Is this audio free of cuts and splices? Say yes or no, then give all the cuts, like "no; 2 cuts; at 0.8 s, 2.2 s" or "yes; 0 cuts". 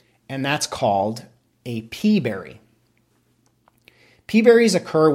yes; 0 cuts